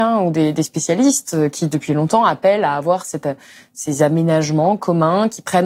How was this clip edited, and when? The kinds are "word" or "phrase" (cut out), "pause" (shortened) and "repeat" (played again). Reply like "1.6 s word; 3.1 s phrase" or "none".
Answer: none